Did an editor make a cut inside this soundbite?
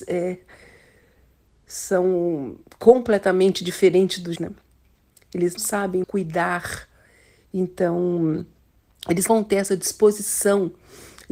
yes; 4 cuts; at 4.4 s, 5.6 s, 6.0 s, 9.3 s

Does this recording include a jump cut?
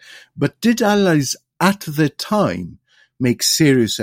no; 0 cuts

